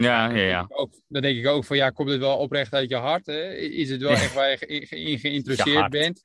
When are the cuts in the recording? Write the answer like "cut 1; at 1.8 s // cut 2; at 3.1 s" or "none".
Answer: none

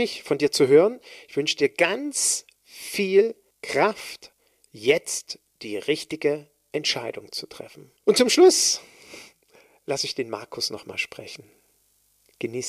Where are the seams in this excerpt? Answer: cut 1; at 3.5 s // cut 2; at 8.0 s

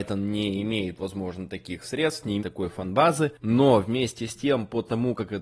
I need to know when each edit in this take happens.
cut 1; at 2.4 s

